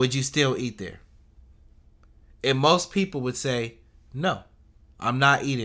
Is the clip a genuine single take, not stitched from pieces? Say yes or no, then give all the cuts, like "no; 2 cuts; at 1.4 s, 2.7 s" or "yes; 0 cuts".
yes; 0 cuts